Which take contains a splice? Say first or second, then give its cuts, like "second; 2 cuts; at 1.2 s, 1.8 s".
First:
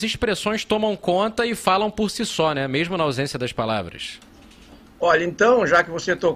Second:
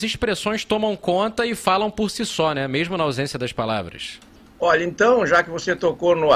second; 1 cut; at 4.4 s